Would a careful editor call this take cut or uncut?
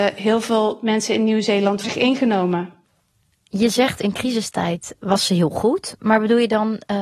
cut